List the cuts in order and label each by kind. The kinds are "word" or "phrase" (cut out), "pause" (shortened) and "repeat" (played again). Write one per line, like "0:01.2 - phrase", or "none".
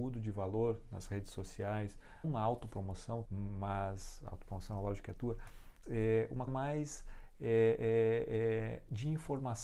0:02.2 - word
0:03.2 - word
0:05.8 - word
0:06.5 - word